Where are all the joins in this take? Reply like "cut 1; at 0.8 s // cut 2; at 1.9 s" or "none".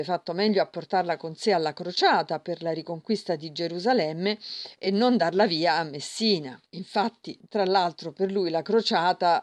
none